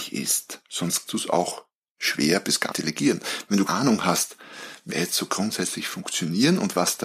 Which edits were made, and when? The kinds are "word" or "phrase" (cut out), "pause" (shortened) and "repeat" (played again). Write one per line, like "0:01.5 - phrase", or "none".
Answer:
0:01.1 - word
0:02.7 - word
0:03.7 - word
0:04.9 - word